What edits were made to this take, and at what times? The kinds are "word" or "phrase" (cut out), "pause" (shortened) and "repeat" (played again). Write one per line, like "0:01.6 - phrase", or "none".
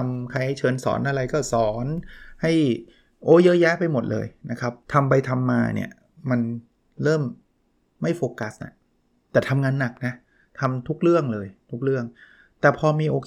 0:04.8 - pause